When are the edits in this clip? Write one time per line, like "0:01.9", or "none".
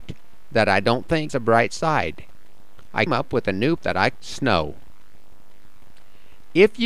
0:01.3
0:03.1
0:03.8
0:04.1